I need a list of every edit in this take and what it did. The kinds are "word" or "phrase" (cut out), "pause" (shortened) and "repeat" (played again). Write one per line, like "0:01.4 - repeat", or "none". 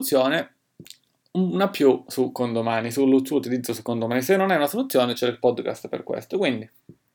none